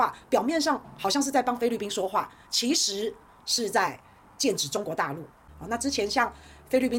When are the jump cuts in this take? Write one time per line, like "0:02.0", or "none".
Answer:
none